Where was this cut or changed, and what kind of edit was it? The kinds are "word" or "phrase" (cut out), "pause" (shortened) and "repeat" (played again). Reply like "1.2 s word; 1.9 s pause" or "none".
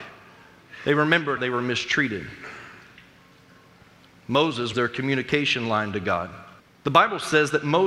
1.4 s word; 4.7 s word; 6.6 s pause

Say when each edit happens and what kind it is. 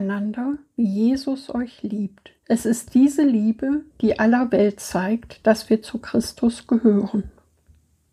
2.4 s pause; 3.9 s pause

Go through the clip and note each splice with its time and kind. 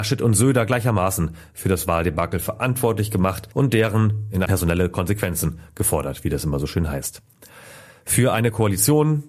3.5 s pause; 4.5 s word

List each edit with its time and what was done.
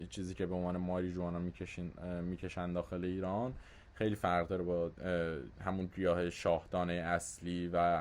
none

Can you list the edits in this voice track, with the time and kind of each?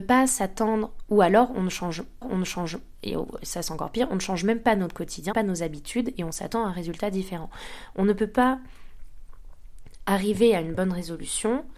2.2 s repeat; 5.3 s phrase

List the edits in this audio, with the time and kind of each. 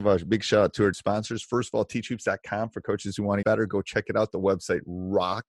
0.9 s word; 3.4 s word

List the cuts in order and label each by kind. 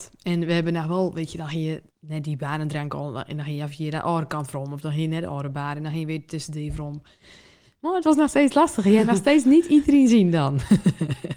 1.9 s pause

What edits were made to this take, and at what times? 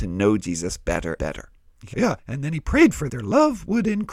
1.2 s word; 1.9 s word; 3.1 s phrase

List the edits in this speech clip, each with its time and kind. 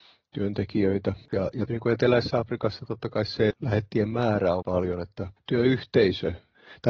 1.3 s pause; 1.7 s word; 3.5 s word; 4.6 s word

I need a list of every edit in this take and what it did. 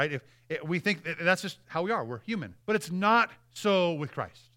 2.6 s pause

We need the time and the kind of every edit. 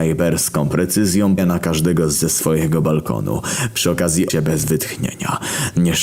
1.4 s word; 2.1 s word; 4.3 s word

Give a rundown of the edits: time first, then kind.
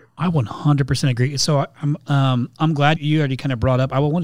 3.0 s word

